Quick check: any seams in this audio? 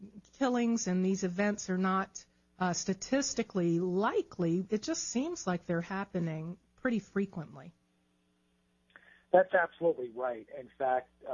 no; 0 cuts

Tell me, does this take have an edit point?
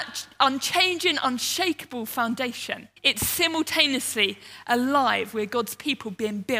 yes; 1 cut; at 3.0 s

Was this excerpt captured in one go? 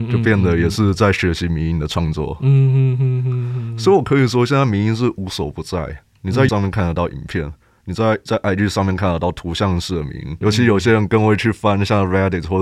no; 3 cuts; at 6.5 s, 8.3 s, 10.4 s

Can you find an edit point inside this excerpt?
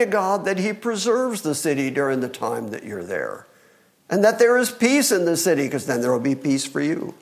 no; 0 cuts

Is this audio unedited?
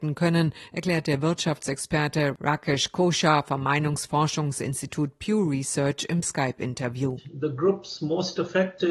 yes; 0 cuts

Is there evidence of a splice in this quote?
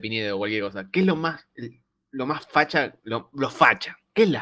no; 0 cuts

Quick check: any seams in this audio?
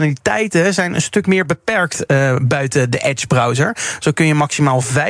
no; 0 cuts

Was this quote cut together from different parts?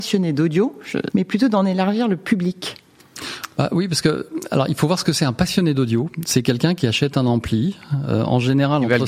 yes; 1 cut; at 1.1 s

